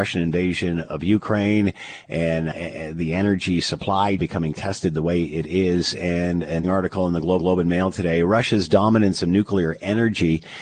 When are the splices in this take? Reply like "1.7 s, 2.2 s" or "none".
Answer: 2.5 s, 4.2 s, 6.6 s, 7.4 s

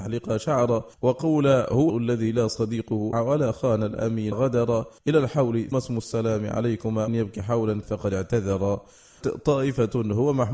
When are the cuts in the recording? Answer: 0.9 s, 1.9 s, 3.1 s, 4.3 s, 5.0 s, 5.7 s, 7.1 s, 7.8 s, 9.2 s

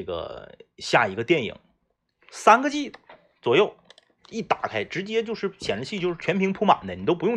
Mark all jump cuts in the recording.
none

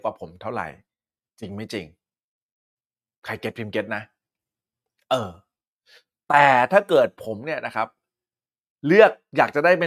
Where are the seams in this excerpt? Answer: none

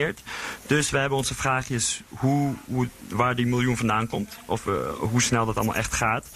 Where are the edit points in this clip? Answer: none

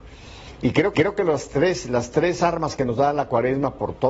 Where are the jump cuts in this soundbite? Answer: 0.9 s

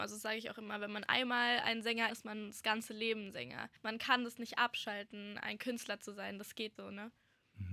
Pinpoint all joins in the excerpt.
2.1 s, 6.8 s

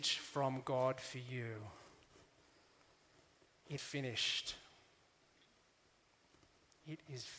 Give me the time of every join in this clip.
3.8 s

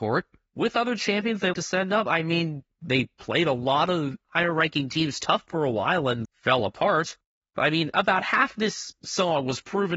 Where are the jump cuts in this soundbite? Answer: 1.5 s, 6.2 s

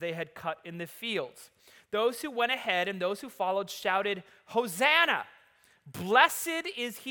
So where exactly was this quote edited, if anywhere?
none

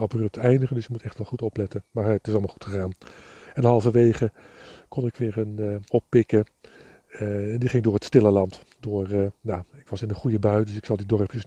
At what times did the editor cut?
1.3 s, 5.9 s

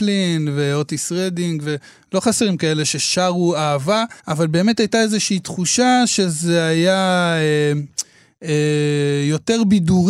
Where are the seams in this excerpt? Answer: 4.2 s

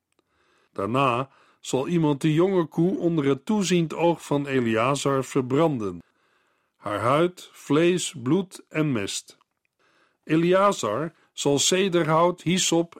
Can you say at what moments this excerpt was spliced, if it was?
none

